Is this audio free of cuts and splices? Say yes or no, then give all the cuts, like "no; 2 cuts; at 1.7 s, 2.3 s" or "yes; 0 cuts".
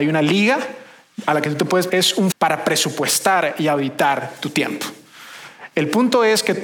no; 2 cuts; at 1.9 s, 2.3 s